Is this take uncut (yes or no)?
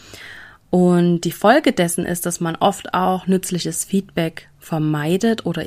yes